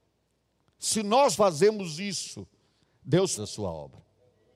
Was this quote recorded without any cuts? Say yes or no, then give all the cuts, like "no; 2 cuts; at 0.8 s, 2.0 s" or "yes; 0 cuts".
no; 2 cuts; at 1.3 s, 3.4 s